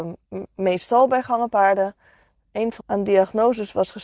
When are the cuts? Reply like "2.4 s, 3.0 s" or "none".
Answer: 2.8 s